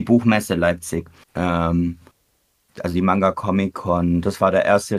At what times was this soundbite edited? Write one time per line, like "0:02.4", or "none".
0:01.2